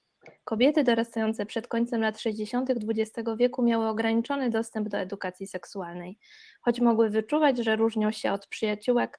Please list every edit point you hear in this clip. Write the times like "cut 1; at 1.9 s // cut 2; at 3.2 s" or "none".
none